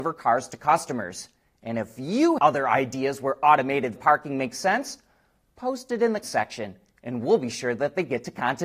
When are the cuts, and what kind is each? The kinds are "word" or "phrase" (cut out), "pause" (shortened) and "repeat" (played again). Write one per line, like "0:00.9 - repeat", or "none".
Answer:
0:02.4 - word
0:04.0 - word
0:06.2 - word